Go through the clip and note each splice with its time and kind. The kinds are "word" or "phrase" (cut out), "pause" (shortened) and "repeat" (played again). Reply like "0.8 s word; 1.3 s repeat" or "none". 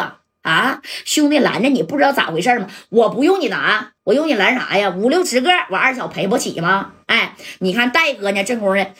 4.0 s pause